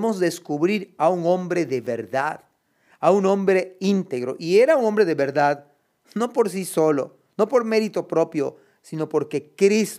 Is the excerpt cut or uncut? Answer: uncut